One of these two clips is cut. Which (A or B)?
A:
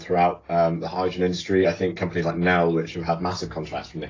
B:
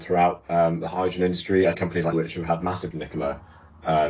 B